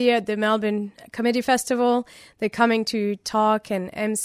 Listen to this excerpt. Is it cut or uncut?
uncut